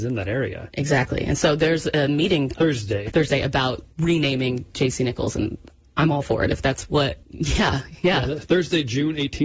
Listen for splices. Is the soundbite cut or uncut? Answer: cut